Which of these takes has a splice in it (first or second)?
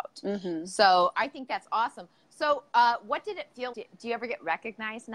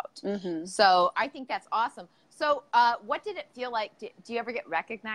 first